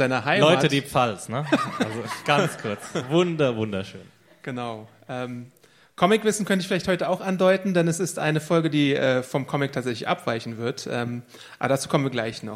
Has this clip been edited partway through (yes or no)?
no